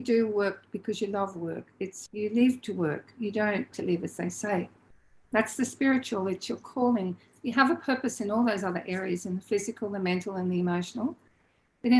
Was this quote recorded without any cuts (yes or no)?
no